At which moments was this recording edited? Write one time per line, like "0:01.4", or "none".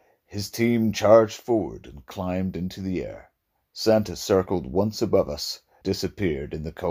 0:05.8